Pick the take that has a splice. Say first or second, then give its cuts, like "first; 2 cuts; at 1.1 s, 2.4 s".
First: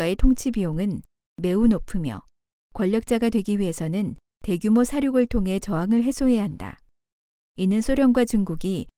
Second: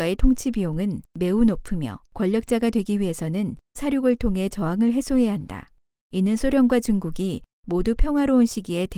second; 4 cuts; at 1.1 s, 2.1 s, 3.8 s, 5.9 s